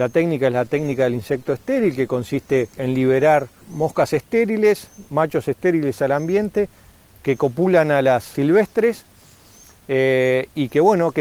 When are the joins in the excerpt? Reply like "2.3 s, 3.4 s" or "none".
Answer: 2.7 s, 3.6 s, 8.3 s

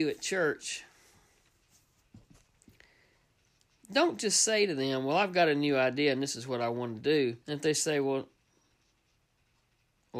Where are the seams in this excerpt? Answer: 7.4 s

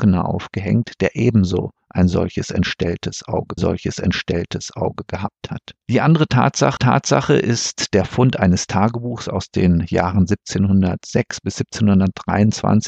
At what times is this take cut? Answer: 3.6 s, 5.8 s, 6.8 s

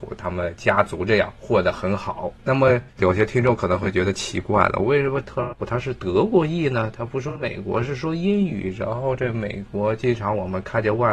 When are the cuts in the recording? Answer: 2.4 s

